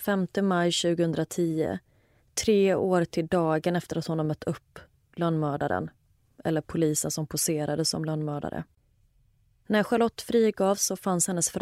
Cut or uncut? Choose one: uncut